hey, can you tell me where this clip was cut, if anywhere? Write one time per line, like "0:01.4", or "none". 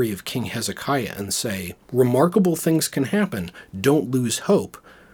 0:01.8